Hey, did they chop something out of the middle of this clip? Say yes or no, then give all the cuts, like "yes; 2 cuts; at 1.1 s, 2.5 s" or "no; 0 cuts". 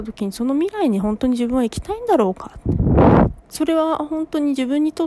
yes; 1 cut; at 3.4 s